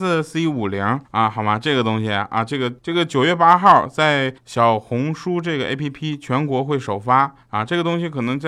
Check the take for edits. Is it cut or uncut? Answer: cut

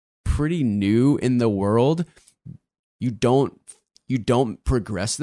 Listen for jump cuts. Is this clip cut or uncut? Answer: uncut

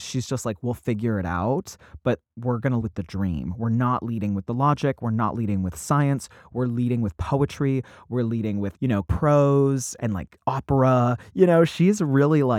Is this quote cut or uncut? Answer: cut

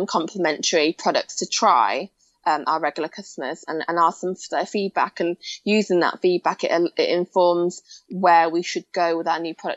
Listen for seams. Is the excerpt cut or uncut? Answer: uncut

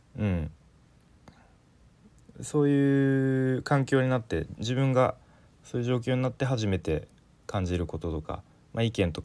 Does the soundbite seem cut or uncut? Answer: uncut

